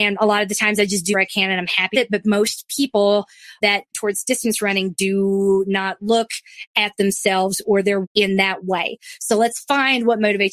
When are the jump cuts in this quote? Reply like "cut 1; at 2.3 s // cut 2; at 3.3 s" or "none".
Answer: cut 1; at 1.1 s // cut 2; at 1.9 s // cut 3; at 3.9 s // cut 4; at 8.0 s